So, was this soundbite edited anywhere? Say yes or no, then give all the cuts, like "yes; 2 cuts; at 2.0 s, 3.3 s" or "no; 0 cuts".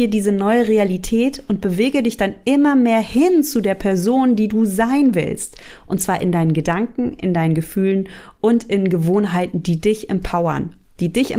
no; 0 cuts